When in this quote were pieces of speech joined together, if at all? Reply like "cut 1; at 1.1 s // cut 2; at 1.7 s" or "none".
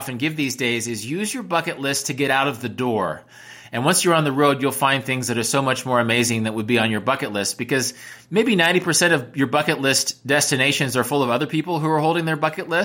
none